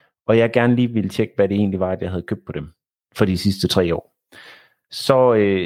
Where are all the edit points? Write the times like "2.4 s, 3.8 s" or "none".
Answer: none